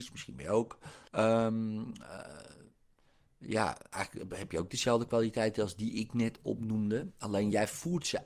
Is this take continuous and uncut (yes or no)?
no